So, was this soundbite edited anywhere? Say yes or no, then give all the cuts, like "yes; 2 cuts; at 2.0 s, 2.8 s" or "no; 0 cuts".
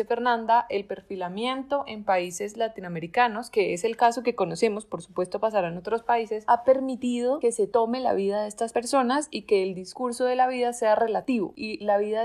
no; 0 cuts